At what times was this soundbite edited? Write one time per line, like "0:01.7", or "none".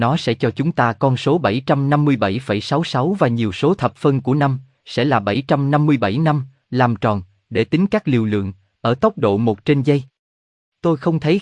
none